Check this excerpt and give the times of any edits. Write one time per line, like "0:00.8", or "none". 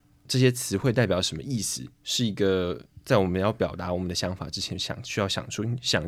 0:01.9